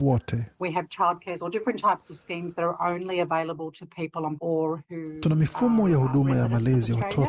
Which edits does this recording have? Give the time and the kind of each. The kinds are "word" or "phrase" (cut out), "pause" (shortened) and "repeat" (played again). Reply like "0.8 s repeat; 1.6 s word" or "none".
1.4 s word; 4.4 s phrase